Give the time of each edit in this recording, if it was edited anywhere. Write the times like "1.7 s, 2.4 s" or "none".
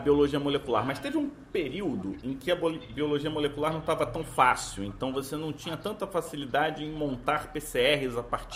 none